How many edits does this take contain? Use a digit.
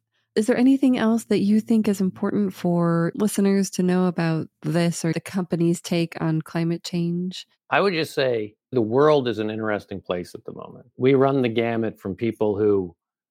2